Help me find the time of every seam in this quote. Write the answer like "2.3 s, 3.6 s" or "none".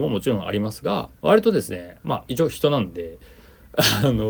1.2 s, 2.3 s

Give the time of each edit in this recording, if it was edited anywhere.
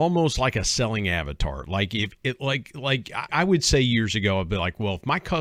3.3 s

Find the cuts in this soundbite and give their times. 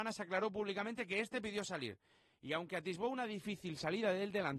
none

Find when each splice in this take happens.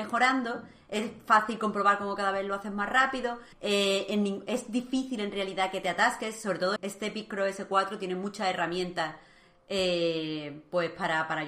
3.5 s, 6.8 s

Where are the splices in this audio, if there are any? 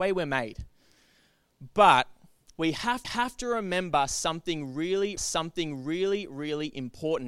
3.0 s, 5.2 s

